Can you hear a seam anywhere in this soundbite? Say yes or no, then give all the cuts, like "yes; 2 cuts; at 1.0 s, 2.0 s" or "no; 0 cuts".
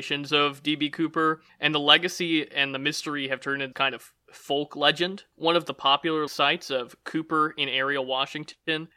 yes; 2 cuts; at 3.7 s, 6.3 s